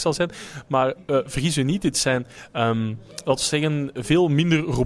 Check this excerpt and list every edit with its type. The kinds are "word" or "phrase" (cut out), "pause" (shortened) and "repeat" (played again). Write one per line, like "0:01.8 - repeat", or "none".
none